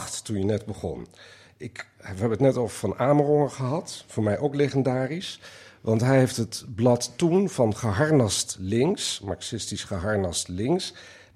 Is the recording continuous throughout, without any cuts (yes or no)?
yes